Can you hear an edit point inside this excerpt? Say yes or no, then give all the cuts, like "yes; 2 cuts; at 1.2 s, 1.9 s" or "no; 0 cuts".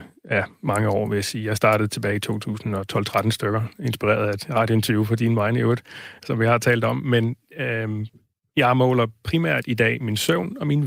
no; 0 cuts